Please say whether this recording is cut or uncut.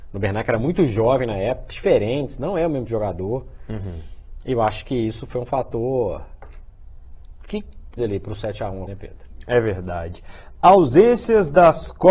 cut